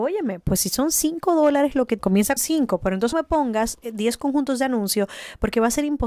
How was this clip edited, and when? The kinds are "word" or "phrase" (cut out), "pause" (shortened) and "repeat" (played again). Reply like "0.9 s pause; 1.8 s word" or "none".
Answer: 2.0 s phrase; 2.4 s word; 3.1 s word